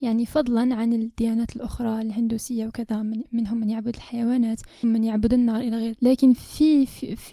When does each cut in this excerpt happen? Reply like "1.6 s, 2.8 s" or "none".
4.8 s, 6.0 s